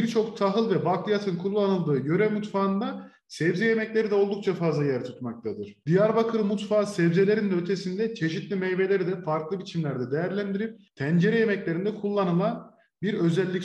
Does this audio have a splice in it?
no; 0 cuts

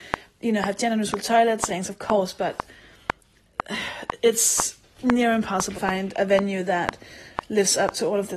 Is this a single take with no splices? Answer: no; 2 cuts; at 1.7 s, 5.7 s

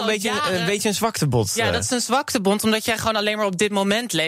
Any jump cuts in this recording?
no; 0 cuts

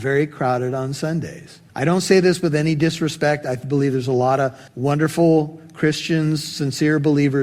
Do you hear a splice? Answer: yes; 2 cuts; at 1.7 s, 4.7 s

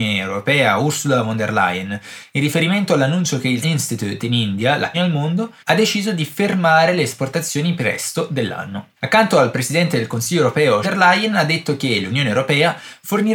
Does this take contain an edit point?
yes; 6 cuts; at 3.6 s, 4.9 s, 5.6 s, 7.8 s, 9.0 s, 10.8 s

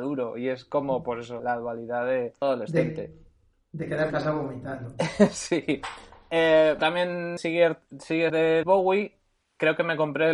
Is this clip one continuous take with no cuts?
no; 7 cuts; at 1.4 s, 2.4 s, 4.1 s, 6.8 s, 7.4 s, 8.3 s, 8.6 s

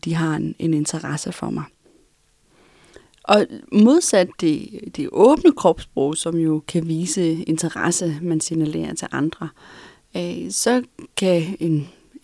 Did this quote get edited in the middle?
no; 0 cuts

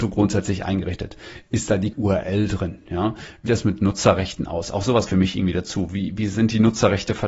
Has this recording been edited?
yes; 3 cuts; at 1.9 s, 3.5 s, 5.1 s

